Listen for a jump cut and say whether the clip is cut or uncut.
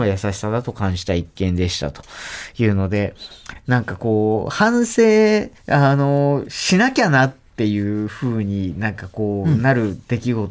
cut